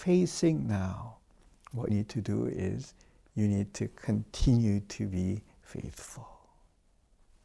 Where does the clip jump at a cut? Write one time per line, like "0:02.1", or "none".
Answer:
0:01.9